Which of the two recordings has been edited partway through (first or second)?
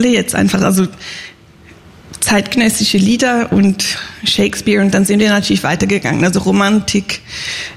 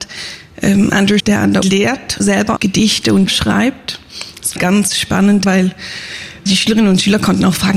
second